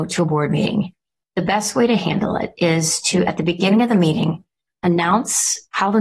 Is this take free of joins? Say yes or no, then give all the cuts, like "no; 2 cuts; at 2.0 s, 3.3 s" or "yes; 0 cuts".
yes; 0 cuts